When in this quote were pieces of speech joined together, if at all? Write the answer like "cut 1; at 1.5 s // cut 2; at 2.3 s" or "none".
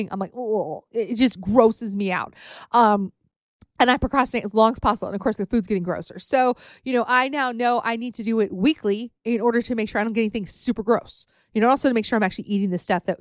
none